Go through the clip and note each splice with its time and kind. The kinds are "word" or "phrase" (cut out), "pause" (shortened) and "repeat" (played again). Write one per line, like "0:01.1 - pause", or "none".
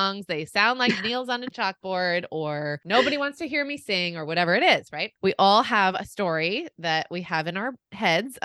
none